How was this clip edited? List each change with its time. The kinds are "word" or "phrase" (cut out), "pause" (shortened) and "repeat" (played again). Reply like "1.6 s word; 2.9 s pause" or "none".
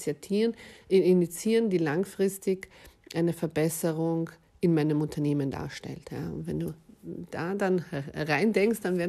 none